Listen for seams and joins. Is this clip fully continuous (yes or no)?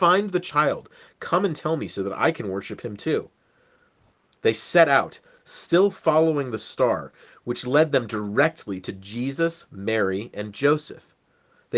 yes